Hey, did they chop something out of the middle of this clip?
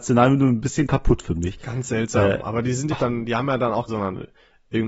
yes; 2 cuts; at 2.9 s, 3.9 s

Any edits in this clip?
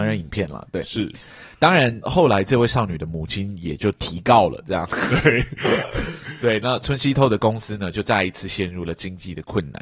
yes; 1 cut; at 2.0 s

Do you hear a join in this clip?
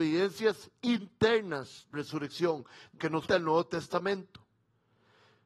yes; 3 cuts; at 1.9 s, 3.0 s, 3.3 s

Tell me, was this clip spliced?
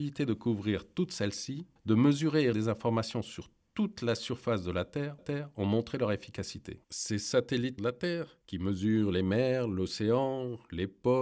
yes; 6 cuts; at 1.8 s, 2.5 s, 5.2 s, 6.8 s, 7.8 s, 8.4 s

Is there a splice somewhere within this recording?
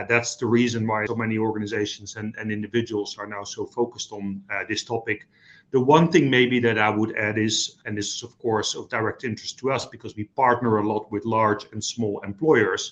yes; 1 cut; at 1.1 s

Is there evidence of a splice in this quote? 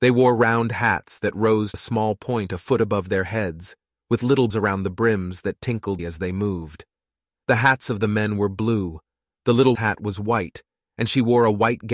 yes; 4 cuts; at 1.7 s, 4.5 s, 6.0 s, 9.7 s

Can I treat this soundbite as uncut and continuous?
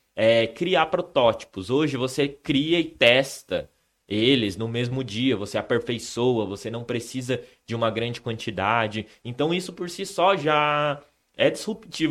yes; 0 cuts

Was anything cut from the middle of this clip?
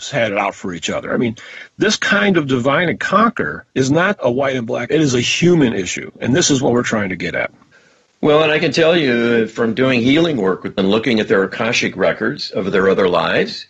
yes; 5 cuts; at 3.7 s, 4.2 s, 4.9 s, 7.7 s, 10.8 s

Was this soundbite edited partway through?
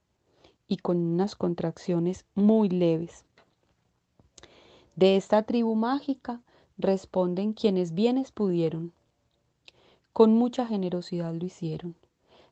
no; 0 cuts

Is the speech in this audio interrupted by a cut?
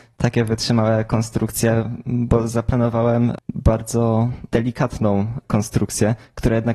no; 0 cuts

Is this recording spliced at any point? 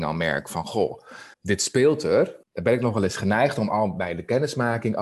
yes; 2 cuts; at 1.3 s, 2.4 s

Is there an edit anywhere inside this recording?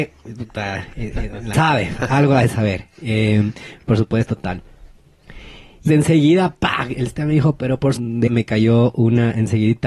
yes; 4 cuts; at 1.5 s, 5.9 s, 8.0 s, 8.3 s

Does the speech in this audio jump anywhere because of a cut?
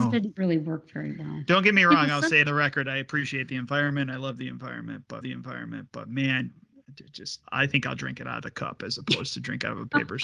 yes; 4 cuts; at 2.4 s, 5.2 s, 7.4 s, 8.0 s

